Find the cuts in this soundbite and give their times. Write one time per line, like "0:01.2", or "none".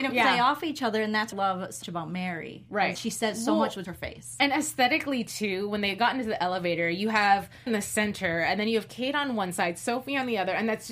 0:01.3
0:01.8
0:02.9
0:03.8
0:07.7